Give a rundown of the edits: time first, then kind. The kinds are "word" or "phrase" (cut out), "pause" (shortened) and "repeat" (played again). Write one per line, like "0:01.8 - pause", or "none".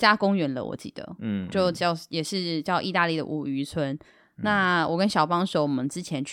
0:01.5 - word